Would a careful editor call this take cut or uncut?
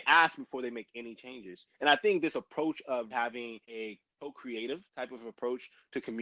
cut